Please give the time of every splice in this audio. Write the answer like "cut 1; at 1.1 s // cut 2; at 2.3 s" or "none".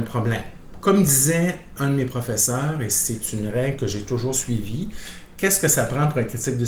cut 1; at 1.8 s